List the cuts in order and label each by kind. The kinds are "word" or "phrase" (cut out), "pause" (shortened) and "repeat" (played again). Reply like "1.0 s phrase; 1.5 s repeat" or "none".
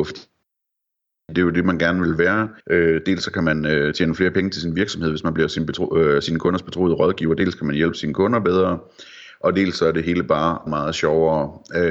2.6 s pause; 10.7 s word